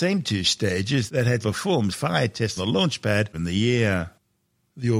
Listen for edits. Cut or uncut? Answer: cut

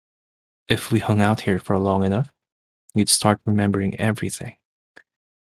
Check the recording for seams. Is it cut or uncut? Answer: uncut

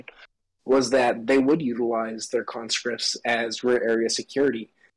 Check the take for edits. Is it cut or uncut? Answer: uncut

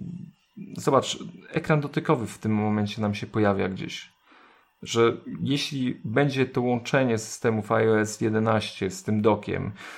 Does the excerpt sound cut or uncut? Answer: uncut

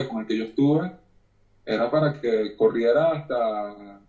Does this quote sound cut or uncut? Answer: uncut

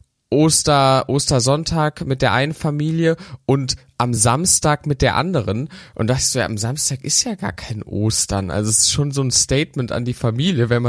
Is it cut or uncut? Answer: uncut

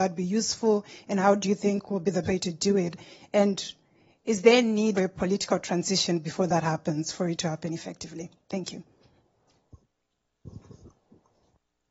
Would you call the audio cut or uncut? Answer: cut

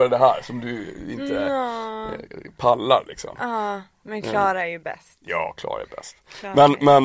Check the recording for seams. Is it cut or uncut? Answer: uncut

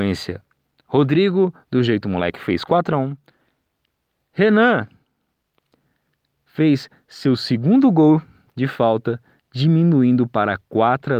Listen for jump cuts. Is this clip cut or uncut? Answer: uncut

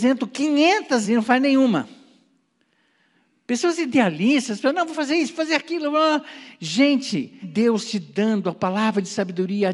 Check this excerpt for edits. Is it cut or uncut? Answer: cut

